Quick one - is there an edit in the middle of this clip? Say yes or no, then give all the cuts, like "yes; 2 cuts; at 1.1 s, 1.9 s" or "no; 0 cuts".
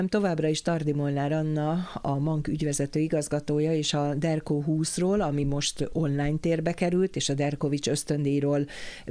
no; 0 cuts